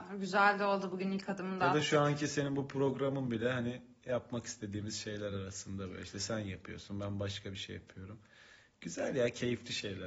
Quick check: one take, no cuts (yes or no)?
yes